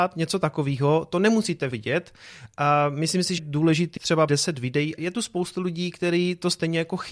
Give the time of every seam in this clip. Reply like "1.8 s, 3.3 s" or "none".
1.7 s, 3.4 s, 4.0 s, 4.3 s, 5.0 s

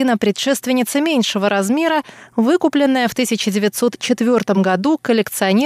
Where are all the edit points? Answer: none

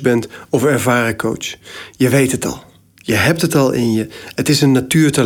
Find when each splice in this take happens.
none

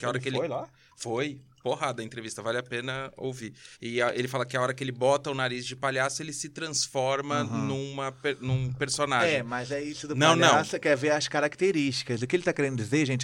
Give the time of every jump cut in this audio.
3.7 s

